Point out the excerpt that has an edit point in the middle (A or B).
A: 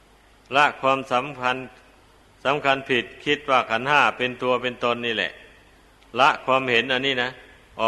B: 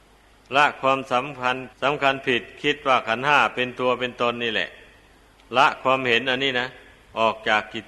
B